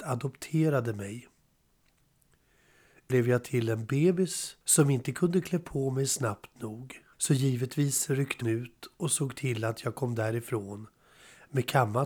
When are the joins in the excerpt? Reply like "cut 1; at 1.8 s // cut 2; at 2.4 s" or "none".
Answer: cut 1; at 3.1 s // cut 2; at 4.6 s // cut 3; at 7.1 s // cut 4; at 8.4 s